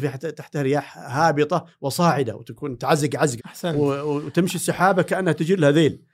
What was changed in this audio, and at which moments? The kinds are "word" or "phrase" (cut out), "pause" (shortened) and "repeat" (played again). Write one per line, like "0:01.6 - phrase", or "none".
0:03.4 - word